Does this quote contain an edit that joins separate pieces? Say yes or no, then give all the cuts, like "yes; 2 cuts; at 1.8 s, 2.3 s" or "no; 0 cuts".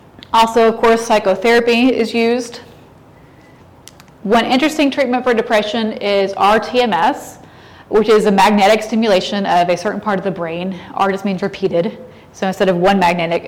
no; 0 cuts